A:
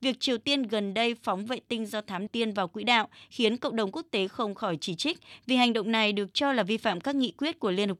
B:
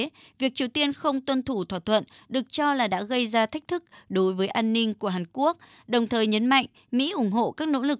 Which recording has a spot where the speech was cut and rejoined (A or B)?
A